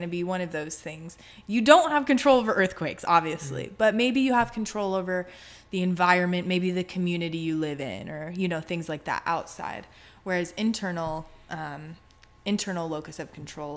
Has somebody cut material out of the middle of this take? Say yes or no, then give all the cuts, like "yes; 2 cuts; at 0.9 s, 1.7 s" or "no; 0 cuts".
no; 0 cuts